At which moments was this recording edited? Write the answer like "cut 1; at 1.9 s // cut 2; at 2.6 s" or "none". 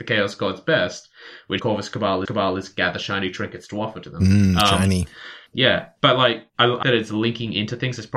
cut 1; at 1.6 s // cut 2; at 2.3 s // cut 3; at 5.5 s // cut 4; at 6.5 s // cut 5; at 6.8 s